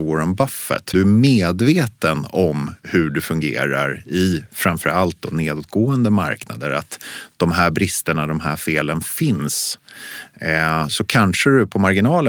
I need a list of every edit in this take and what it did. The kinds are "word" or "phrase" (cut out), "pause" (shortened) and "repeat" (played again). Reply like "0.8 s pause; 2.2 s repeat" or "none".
0.9 s phrase